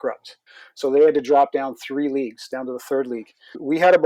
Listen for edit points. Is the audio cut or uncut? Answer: uncut